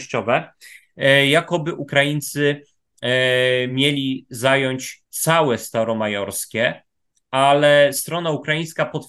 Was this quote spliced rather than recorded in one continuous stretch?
no; 0 cuts

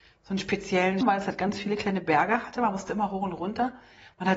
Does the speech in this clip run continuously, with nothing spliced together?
no; 1 cut; at 1.0 s

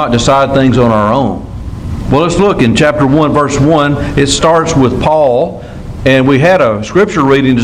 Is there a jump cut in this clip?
no; 0 cuts

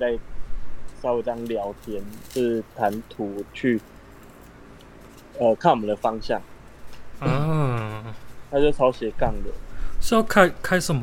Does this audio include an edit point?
no; 0 cuts

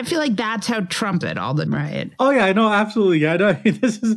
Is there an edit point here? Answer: yes; 2 cuts; at 1.2 s, 1.7 s

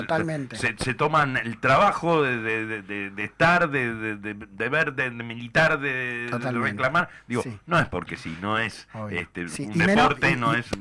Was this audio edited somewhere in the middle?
no; 0 cuts

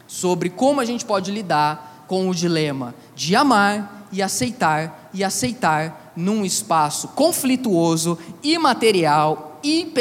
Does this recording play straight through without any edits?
no; 1 cut; at 5.1 s

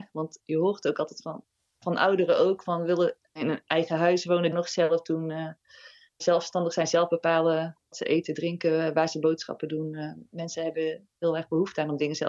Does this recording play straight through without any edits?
no; 5 cuts; at 1.8 s, 3.2 s, 4.5 s, 6.2 s, 7.9 s

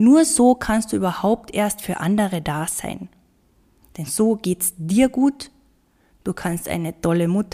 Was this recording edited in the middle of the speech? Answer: no; 0 cuts

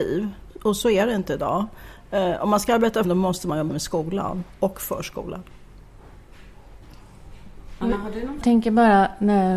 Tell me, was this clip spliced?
yes; 3 cuts; at 3.0 s, 3.7 s, 8.4 s

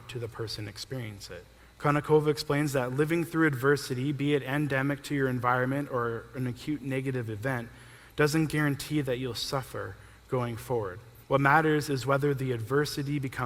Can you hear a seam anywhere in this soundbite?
yes; 2 cuts; at 1.6 s, 11.2 s

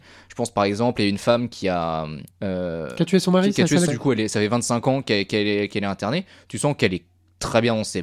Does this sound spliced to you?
yes; 2 cuts; at 2.3 s, 3.9 s

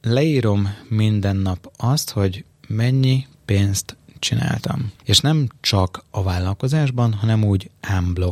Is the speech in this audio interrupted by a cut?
yes; 1 cut; at 5.0 s

